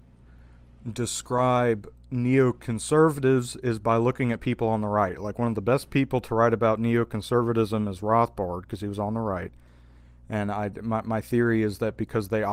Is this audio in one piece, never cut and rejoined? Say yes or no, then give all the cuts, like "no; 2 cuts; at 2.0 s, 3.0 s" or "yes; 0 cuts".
yes; 0 cuts